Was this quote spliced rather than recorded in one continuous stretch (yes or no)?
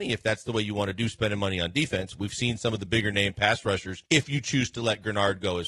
yes